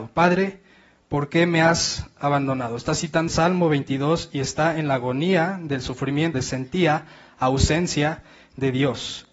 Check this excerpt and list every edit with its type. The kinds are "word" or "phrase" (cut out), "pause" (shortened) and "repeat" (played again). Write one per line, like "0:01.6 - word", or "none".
0:03.3 - word
0:06.3 - phrase